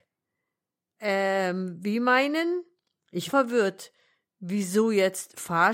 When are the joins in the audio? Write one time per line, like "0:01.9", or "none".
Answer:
0:03.3